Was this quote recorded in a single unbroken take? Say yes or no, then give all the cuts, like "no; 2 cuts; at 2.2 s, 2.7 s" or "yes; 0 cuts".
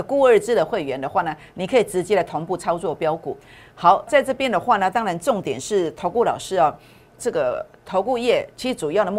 no; 2 cuts; at 4.1 s, 7.2 s